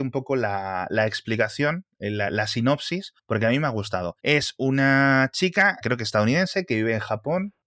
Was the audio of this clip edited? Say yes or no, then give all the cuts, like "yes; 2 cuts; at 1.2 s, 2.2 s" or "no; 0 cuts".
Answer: yes; 3 cuts; at 3.2 s, 4.2 s, 5.8 s